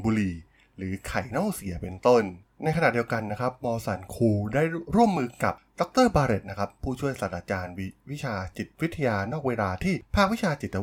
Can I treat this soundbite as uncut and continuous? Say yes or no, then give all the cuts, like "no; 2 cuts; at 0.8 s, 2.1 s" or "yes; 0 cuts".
no; 1 cut; at 2.4 s